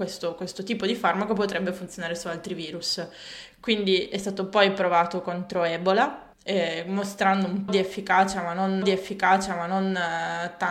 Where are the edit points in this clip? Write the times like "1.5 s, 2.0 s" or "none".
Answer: 6.3 s, 7.7 s, 8.8 s